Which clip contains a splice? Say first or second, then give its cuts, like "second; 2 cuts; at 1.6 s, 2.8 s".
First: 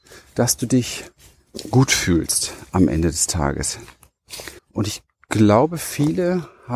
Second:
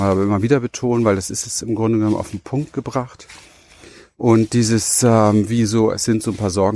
first; 1 cut; at 4.6 s